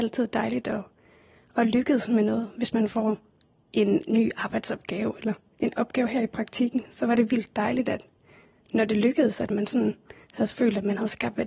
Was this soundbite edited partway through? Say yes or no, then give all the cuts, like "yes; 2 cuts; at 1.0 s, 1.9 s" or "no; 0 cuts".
no; 0 cuts